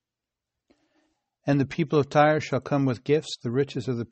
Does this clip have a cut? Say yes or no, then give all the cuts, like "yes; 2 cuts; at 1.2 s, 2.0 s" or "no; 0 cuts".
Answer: no; 0 cuts